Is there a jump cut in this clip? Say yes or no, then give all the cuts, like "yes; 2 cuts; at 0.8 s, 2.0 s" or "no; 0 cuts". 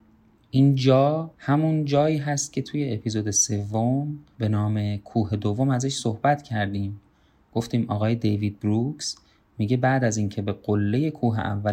no; 0 cuts